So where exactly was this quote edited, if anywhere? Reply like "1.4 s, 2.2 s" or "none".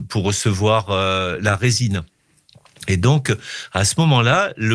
none